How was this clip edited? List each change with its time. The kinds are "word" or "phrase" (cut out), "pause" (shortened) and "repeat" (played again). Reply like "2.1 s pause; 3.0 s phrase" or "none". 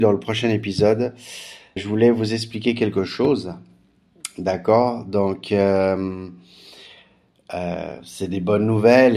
1.8 s word